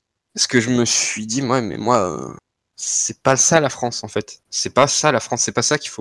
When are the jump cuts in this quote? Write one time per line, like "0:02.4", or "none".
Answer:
none